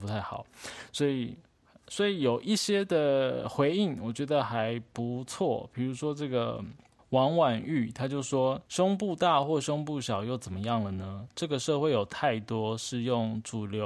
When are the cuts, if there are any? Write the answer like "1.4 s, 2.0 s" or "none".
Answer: 7.0 s, 8.7 s

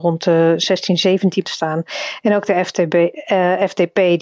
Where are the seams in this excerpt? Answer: 1.4 s

